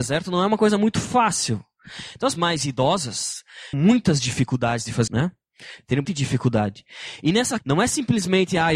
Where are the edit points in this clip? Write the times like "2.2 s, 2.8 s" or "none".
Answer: 2.4 s, 3.7 s, 5.1 s, 6.0 s, 7.6 s